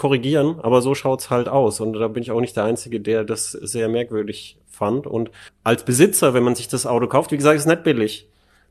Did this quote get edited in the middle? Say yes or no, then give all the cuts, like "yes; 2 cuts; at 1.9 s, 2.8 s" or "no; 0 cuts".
yes; 1 cut; at 5.5 s